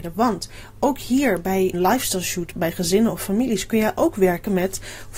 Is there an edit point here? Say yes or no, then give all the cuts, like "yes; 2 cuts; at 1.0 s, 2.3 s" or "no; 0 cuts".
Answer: yes; 2 cuts; at 1.7 s, 2.5 s